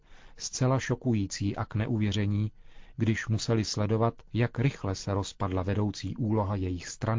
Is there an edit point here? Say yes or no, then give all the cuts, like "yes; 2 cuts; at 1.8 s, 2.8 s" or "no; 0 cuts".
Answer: yes; 1 cut; at 4.3 s